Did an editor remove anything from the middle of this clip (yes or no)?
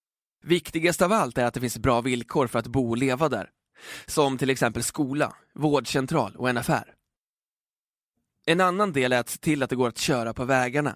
no